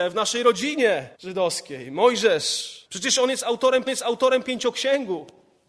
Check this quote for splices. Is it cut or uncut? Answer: cut